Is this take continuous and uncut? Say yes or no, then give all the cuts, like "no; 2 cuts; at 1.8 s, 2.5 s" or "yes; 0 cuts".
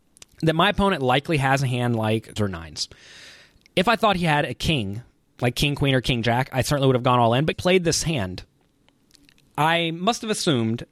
no; 2 cuts; at 2.4 s, 7.5 s